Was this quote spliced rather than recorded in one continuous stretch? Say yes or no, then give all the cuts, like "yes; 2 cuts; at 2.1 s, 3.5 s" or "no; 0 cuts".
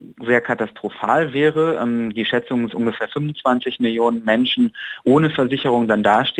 yes; 1 cut; at 2.7 s